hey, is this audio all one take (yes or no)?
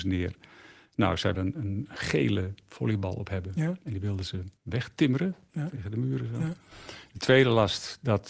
no